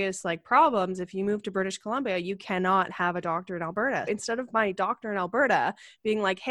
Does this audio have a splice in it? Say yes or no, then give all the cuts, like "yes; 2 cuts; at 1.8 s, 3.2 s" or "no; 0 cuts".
yes; 1 cut; at 4.1 s